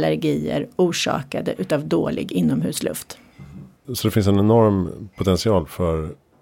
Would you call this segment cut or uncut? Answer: cut